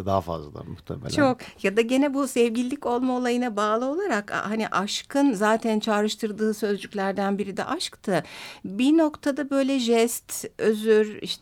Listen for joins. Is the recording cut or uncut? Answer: uncut